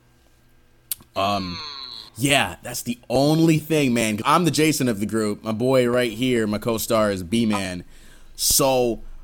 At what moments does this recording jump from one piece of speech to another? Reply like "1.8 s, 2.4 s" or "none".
2.1 s, 4.2 s